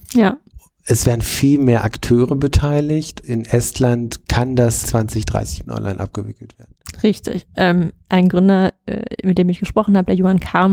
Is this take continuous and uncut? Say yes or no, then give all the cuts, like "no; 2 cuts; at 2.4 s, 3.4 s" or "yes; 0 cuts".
no; 4 cuts; at 3.2 s, 4.2 s, 4.8 s, 5.6 s